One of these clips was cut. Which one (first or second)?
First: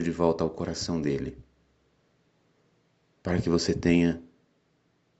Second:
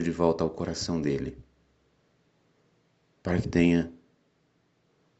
second